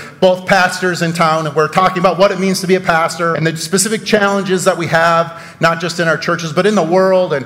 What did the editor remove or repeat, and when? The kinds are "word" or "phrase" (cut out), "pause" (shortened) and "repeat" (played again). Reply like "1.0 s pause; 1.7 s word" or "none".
3.3 s word